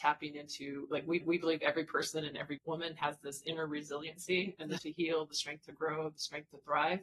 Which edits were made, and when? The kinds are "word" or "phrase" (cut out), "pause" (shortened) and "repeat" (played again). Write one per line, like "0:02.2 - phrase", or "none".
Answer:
0:01.2 - repeat
0:02.6 - word
0:04.8 - word